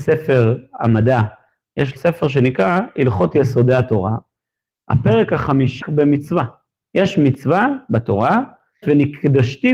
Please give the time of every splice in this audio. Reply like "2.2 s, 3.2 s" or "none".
2.0 s, 5.8 s, 8.8 s